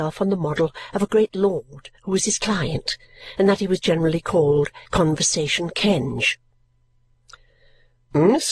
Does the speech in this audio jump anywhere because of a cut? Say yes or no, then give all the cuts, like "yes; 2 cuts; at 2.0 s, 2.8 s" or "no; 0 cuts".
yes; 2 cuts; at 2.0 s, 4.9 s